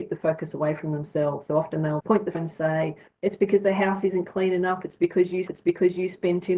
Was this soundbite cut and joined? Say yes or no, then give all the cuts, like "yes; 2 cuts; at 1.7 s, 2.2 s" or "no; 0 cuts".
yes; 3 cuts; at 2.0 s, 2.3 s, 5.5 s